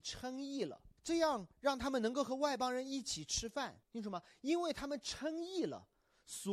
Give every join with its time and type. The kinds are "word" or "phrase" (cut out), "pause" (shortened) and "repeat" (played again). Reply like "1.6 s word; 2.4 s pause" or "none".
1.0 s pause; 1.5 s pause; 3.8 s pause